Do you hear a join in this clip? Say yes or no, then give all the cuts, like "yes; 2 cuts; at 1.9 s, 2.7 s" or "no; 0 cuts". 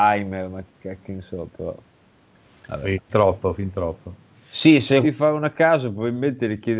yes; 2 cuts; at 3.1 s, 5.0 s